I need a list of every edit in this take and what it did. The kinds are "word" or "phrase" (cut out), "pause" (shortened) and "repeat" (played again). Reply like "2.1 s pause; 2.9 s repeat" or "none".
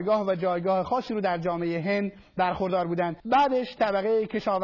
3.2 s pause

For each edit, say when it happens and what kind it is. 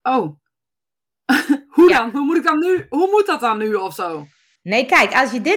none

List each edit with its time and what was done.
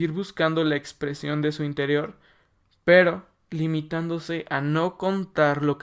none

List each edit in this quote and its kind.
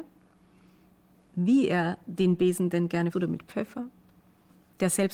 3.1 s phrase

